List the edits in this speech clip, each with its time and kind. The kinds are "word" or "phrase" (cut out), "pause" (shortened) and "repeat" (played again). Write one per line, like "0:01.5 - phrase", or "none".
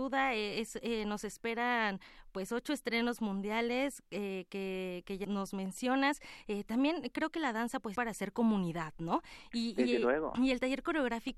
0:05.2 - word
0:07.9 - phrase